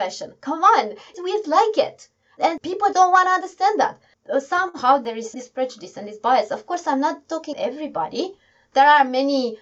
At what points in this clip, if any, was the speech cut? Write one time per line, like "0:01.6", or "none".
0:01.4
0:02.9
0:05.3
0:07.5